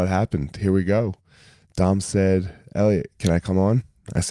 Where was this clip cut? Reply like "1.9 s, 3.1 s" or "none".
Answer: none